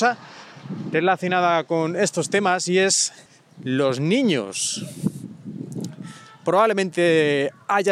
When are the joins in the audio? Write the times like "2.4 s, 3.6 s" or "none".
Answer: none